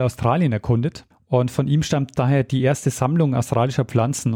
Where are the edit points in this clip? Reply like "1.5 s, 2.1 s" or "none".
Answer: 1.1 s